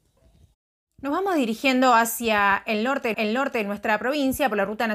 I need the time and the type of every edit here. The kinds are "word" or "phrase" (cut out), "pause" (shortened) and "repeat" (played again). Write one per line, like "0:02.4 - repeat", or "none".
0:03.1 - repeat